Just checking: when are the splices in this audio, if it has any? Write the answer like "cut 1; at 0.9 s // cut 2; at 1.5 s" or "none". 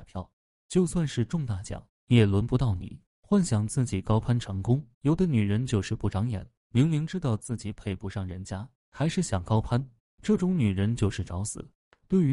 cut 1; at 3.1 s // cut 2; at 4.9 s // cut 3; at 8.8 s

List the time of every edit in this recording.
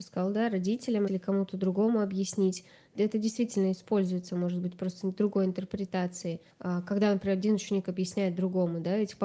cut 1; at 1.1 s // cut 2; at 2.9 s // cut 3; at 6.5 s

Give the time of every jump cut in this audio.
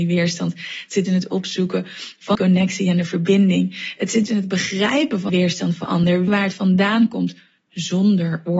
cut 1; at 1.1 s // cut 2; at 2.3 s // cut 3; at 4.3 s // cut 4; at 5.3 s // cut 5; at 5.8 s // cut 6; at 6.3 s

